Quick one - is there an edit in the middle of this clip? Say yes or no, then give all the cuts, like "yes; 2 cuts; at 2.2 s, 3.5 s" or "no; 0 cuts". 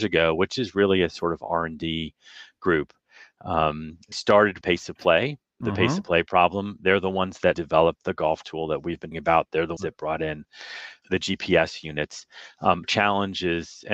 yes; 9 cuts; at 4.1 s, 4.6 s, 5.6 s, 7.5 s, 8.4 s, 9.1 s, 9.8 s, 11.0 s, 12.8 s